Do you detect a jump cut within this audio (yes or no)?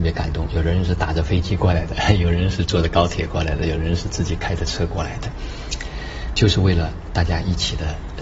yes